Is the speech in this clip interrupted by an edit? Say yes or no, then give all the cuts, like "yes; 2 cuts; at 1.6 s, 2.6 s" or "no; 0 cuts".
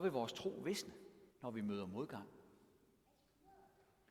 yes; 1 cut; at 1.3 s